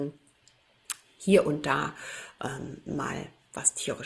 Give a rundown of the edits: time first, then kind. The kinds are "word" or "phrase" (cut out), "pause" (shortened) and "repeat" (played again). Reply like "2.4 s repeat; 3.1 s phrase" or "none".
none